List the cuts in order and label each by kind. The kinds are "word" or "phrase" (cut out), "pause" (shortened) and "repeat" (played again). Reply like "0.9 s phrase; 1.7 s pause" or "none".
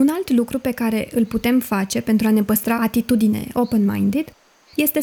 2.8 s word

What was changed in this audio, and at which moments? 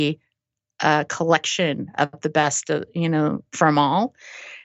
none

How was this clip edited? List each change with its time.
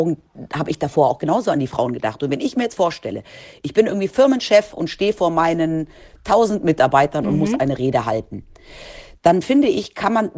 none

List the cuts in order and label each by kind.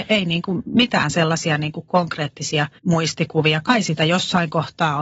2.8 s pause

